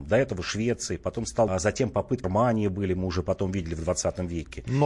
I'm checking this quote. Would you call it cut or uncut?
cut